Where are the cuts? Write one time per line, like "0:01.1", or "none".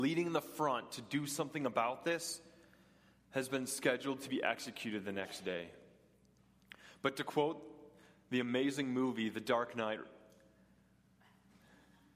none